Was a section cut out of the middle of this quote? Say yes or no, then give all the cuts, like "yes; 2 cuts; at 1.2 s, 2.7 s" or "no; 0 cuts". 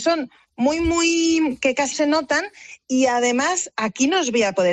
yes; 1 cut; at 1.9 s